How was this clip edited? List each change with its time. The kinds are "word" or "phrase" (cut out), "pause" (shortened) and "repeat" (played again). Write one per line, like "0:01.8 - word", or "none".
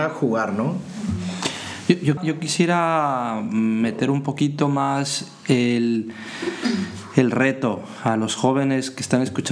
0:02.2 - word

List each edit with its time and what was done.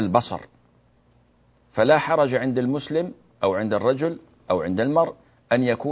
none

